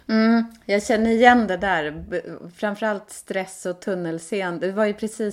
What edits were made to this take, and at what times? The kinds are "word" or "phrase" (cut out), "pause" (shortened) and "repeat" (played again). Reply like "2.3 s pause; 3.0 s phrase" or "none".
none